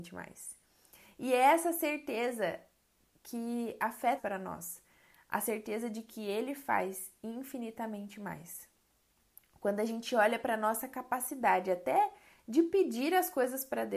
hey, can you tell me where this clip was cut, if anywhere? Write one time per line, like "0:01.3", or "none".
0:03.1
0:04.2